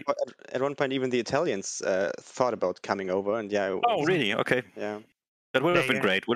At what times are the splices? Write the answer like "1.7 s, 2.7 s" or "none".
4.7 s